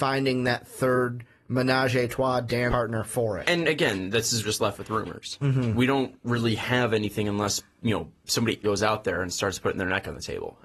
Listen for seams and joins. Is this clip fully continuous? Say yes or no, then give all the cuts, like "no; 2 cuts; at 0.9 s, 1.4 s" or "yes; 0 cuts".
no; 3 cuts; at 2.7 s, 4.4 s, 8.6 s